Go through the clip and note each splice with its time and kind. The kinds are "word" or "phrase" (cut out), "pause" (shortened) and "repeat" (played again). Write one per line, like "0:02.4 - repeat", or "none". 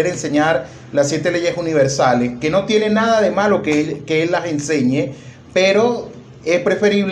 none

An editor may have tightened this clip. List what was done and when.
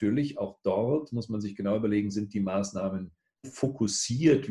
0:03.4 - word

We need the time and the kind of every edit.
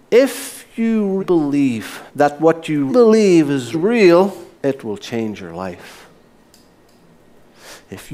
0:01.2 - word
0:02.1 - pause
0:02.9 - word
0:03.7 - word
0:04.5 - pause

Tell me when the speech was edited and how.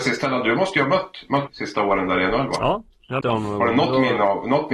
0:01.5 - word
0:03.2 - word

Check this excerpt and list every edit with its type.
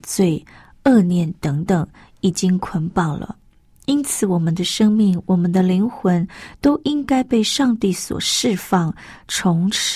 none

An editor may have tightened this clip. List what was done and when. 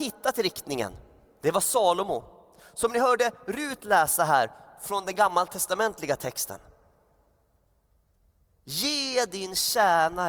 none

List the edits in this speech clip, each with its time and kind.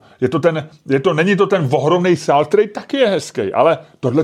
none

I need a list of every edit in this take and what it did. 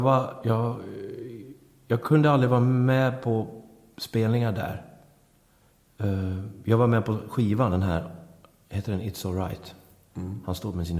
none

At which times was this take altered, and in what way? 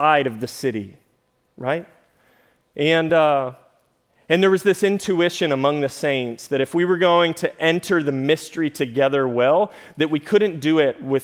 none

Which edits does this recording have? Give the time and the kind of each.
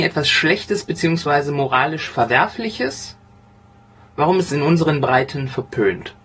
0:04.5 - word

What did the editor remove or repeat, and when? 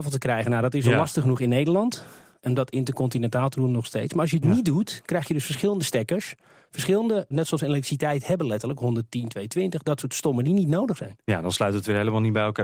0:07.3 - word
0:10.4 - word

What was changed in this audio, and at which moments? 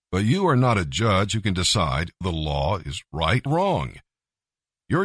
0:02.2 - word
0:03.5 - word

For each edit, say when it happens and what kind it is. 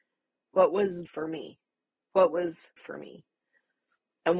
0:01.1 - word
0:01.9 - pause
0:02.8 - word

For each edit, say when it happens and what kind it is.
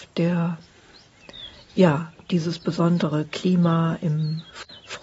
none

